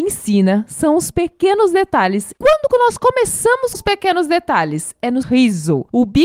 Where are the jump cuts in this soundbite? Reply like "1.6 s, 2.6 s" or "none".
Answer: 3.7 s, 5.2 s